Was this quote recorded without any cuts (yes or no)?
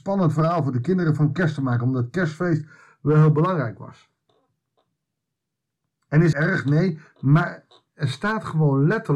no